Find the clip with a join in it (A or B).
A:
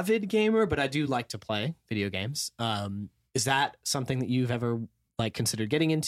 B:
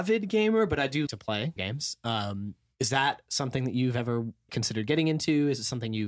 B